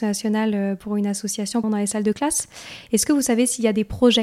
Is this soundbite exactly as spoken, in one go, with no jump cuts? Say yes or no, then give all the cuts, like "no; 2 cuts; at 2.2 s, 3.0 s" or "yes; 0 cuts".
no; 1 cut; at 1.6 s